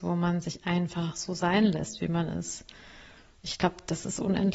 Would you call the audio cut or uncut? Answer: uncut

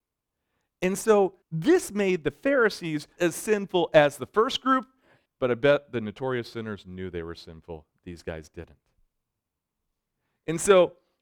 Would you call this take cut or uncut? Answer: cut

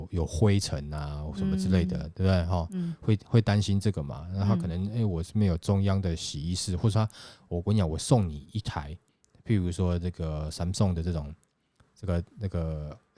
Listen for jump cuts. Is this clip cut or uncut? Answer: uncut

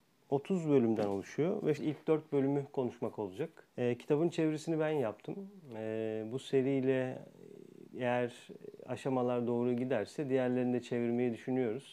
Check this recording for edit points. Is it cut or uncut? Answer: cut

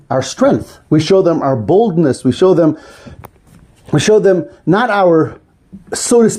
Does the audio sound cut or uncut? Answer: uncut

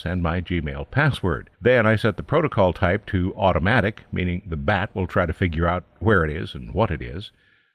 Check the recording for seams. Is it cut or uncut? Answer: cut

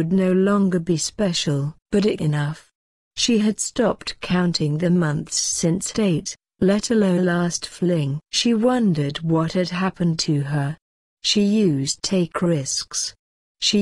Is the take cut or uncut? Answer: cut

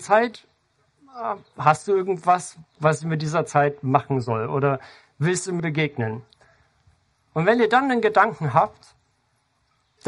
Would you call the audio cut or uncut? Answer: cut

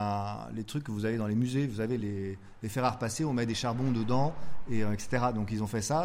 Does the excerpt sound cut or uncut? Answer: uncut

